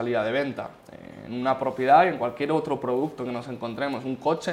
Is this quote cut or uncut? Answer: uncut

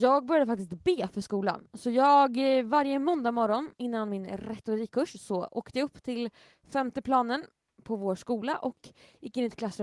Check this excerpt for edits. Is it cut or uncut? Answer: uncut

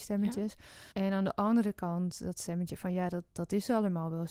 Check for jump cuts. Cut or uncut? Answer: cut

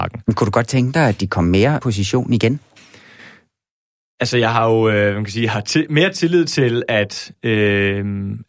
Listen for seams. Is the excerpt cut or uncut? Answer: cut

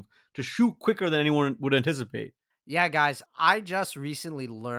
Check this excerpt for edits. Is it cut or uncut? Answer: uncut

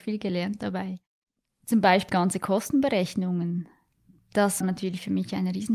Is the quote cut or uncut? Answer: cut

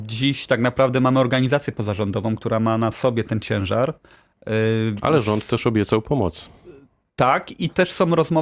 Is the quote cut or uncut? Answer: uncut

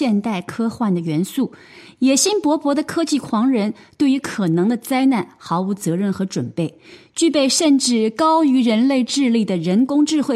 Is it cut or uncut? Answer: uncut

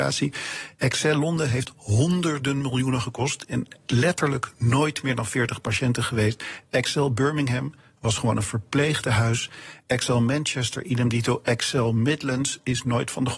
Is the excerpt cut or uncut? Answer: uncut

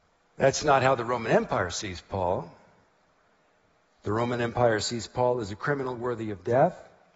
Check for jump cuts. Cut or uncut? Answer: uncut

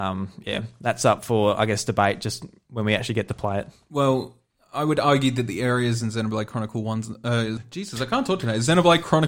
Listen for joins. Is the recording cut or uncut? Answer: cut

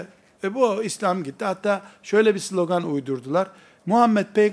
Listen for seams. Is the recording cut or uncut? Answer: uncut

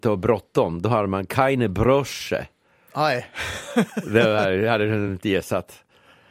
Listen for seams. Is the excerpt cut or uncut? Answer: uncut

